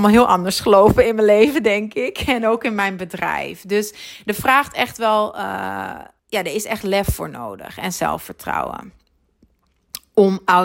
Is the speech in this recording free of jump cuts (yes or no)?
no